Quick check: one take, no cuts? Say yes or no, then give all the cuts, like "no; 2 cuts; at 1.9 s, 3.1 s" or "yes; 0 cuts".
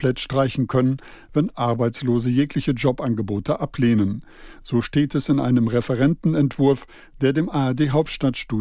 yes; 0 cuts